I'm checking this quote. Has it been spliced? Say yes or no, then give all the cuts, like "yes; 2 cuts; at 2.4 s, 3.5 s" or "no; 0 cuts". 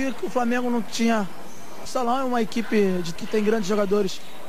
yes; 2 cuts; at 1.9 s, 3.2 s